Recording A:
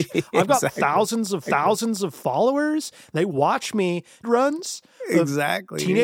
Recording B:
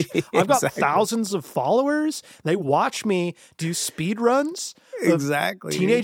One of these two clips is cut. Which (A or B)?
A